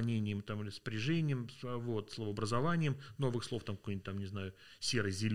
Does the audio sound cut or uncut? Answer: uncut